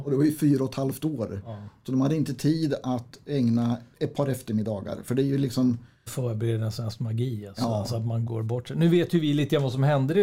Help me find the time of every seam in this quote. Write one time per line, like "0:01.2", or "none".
0:03.9
0:06.1
0:08.3